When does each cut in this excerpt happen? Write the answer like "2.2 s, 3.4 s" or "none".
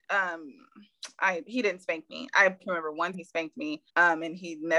2.6 s, 3.1 s, 3.9 s